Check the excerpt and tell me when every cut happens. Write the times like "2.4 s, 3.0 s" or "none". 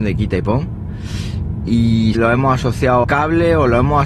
2.1 s, 3.0 s